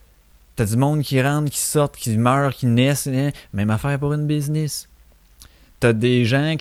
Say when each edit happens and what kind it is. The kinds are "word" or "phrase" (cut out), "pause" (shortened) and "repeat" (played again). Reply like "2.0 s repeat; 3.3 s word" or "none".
none